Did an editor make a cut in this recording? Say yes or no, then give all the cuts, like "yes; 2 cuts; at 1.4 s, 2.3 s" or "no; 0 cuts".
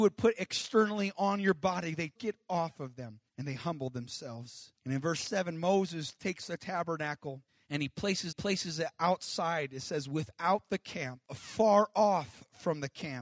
yes; 6 cuts; at 2.1 s, 3.3 s, 4.7 s, 7.5 s, 8.3 s, 11.2 s